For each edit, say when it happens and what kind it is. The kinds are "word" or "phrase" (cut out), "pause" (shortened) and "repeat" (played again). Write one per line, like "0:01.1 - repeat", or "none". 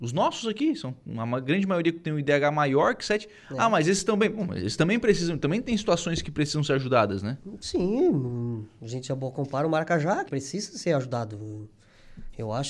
0:10.3 - word